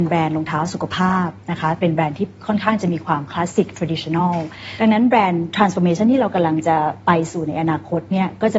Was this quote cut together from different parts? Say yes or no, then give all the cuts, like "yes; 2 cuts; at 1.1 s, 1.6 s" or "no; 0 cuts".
no; 0 cuts